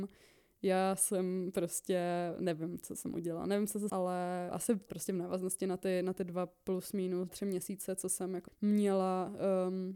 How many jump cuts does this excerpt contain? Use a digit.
4